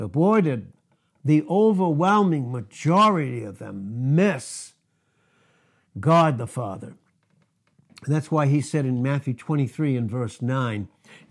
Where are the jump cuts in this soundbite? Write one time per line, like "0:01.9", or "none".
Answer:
none